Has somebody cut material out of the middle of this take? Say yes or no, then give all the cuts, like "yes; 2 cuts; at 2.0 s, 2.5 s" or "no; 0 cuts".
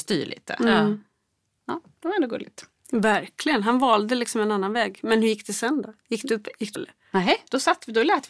yes; 1 cut; at 6.8 s